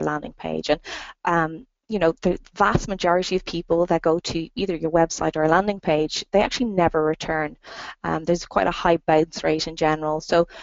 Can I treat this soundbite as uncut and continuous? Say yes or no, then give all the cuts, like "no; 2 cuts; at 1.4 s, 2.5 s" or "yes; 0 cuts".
yes; 0 cuts